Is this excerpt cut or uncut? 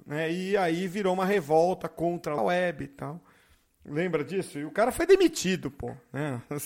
cut